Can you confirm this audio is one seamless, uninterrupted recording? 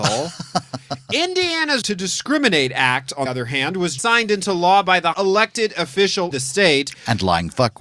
no; 5 cuts; at 1.8 s, 3.3 s, 4.0 s, 5.1 s, 6.3 s

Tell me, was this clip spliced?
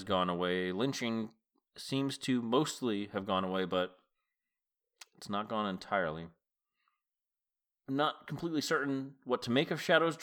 no; 0 cuts

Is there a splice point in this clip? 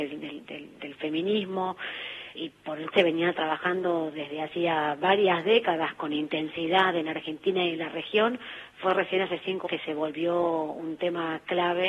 yes; 3 cuts; at 2.3 s, 2.9 s, 9.7 s

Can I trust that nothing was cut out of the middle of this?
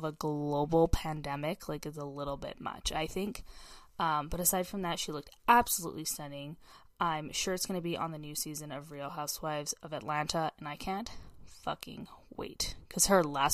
yes; 0 cuts

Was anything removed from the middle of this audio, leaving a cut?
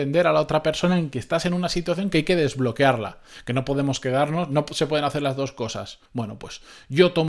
yes; 1 cut; at 6.1 s

